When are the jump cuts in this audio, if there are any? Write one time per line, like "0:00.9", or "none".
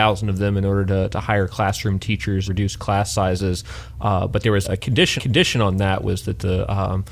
0:02.5
0:04.6
0:05.2